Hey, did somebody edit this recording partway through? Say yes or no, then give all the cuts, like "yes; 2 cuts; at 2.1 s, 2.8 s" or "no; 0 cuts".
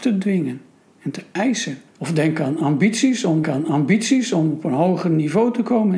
yes; 2 cuts; at 1.9 s, 3.4 s